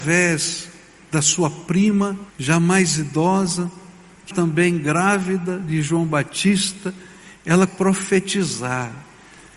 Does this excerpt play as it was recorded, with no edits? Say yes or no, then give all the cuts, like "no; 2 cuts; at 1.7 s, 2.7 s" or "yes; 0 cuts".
no; 3 cuts; at 2.3 s, 4.3 s, 7.7 s